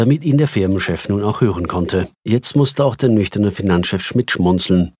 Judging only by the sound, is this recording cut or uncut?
cut